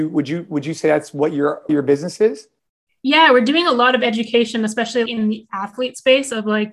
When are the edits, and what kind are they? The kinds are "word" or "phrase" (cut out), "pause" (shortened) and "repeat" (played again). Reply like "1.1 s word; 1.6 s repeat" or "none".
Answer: 1.7 s word; 5.1 s word

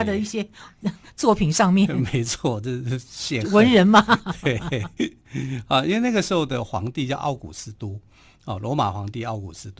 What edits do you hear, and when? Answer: none

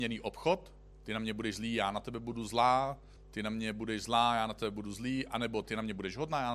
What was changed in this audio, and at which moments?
0.9 s pause; 3.2 s pause

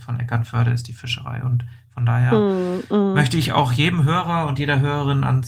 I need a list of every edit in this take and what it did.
none

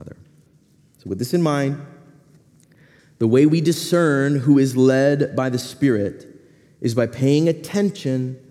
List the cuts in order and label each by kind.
none

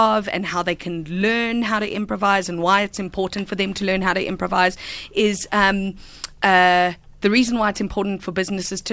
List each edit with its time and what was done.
none

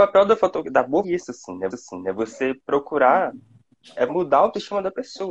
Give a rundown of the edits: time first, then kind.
1.0 s phrase; 1.7 s repeat; 4.1 s word

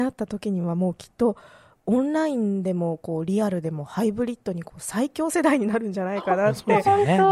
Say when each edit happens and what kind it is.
none

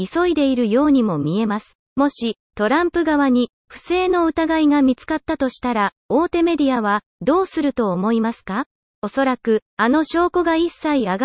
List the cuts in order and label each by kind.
1.8 s pause; 8.8 s pause

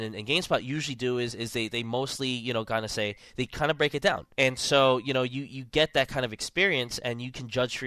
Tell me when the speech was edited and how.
4.3 s pause

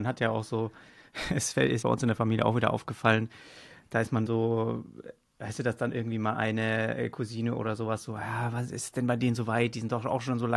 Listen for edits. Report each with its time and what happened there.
1.8 s word; 4.3 s word

